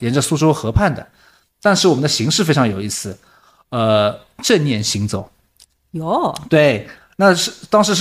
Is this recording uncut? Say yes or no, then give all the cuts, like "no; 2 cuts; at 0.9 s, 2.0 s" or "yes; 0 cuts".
yes; 0 cuts